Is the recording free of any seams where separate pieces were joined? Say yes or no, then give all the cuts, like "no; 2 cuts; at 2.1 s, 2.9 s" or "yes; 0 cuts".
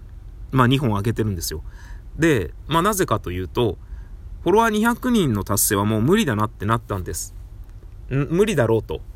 yes; 0 cuts